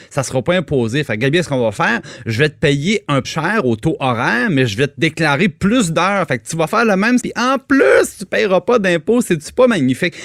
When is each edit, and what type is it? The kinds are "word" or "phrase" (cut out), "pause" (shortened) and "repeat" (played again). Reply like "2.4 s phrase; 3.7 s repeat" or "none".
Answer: 3.2 s word; 7.2 s word